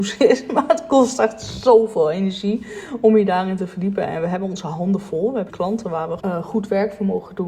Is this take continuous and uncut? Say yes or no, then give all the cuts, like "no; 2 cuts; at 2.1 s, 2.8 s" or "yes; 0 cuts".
no; 2 cuts; at 5.5 s, 6.2 s